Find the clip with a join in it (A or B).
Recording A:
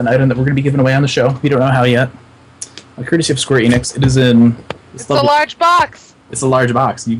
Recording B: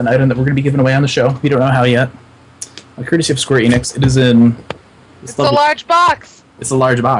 A